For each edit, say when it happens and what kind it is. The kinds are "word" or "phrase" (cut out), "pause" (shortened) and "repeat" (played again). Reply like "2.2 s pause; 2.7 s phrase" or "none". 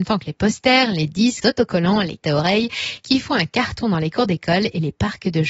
1.4 s word; 2.2 s word